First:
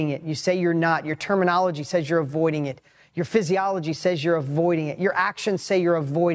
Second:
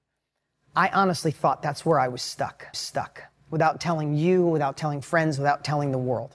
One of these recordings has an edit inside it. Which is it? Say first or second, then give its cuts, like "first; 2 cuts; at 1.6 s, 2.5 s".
second; 1 cut; at 2.7 s